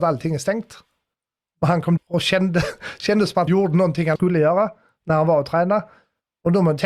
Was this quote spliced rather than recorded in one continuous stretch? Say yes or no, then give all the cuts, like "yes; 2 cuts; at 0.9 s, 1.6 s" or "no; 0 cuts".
yes; 3 cuts; at 2.0 s, 3.5 s, 4.2 s